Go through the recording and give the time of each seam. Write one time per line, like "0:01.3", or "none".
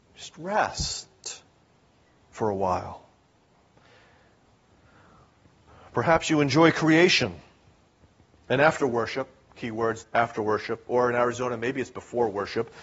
0:10.0